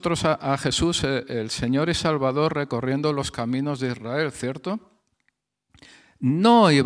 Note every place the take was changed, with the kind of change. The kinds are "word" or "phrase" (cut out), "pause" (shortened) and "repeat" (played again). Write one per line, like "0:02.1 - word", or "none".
none